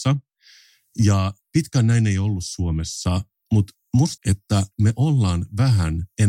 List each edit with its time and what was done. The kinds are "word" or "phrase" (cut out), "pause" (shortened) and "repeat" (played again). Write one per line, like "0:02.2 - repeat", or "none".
0:04.2 - word